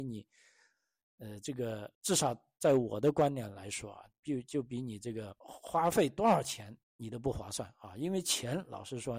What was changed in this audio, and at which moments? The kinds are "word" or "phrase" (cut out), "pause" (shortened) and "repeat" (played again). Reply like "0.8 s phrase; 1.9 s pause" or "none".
1.9 s pause; 5.4 s pause; 6.8 s pause